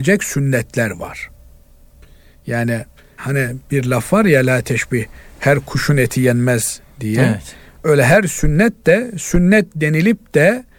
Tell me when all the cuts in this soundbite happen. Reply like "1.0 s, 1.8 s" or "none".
none